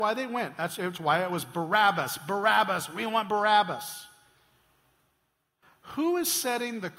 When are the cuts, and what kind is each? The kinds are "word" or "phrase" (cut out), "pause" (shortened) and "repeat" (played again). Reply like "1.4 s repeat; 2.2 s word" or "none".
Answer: none